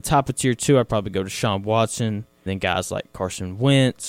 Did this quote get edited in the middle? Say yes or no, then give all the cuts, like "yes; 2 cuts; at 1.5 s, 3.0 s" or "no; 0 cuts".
yes; 1 cut; at 2.5 s